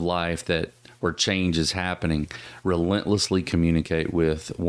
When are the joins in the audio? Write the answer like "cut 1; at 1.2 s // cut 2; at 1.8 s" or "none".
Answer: none